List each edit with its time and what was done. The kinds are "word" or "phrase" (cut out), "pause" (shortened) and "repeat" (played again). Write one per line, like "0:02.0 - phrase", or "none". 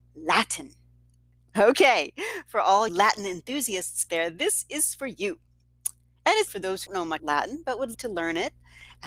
0:02.9 - word
0:04.1 - word
0:06.5 - word
0:06.9 - word
0:07.2 - word
0:07.9 - word